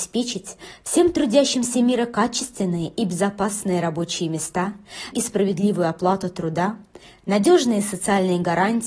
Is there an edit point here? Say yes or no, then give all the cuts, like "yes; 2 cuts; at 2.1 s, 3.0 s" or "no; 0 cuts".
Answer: yes; 1 cut; at 5.1 s